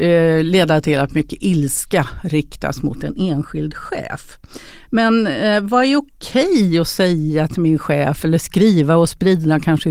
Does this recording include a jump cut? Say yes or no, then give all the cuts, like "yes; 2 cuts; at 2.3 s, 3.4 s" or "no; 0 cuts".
no; 0 cuts